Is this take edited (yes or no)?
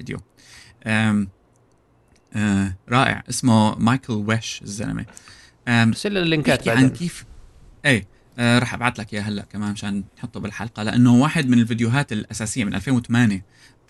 no